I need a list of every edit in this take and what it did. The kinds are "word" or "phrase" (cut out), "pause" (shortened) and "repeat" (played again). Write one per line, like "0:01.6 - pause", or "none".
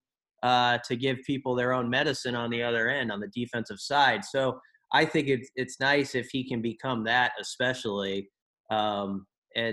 none